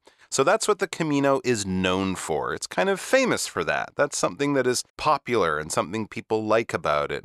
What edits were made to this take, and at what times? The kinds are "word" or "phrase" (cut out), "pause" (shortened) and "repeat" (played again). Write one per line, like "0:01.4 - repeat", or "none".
0:04.9 - pause